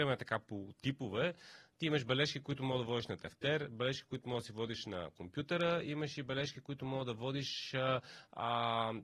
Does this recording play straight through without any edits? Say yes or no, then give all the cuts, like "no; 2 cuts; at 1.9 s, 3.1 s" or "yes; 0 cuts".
yes; 0 cuts